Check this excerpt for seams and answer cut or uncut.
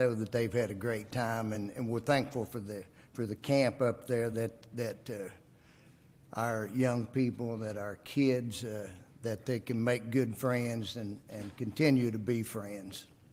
uncut